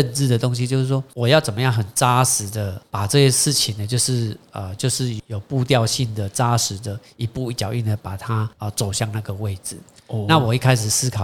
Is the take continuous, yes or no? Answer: yes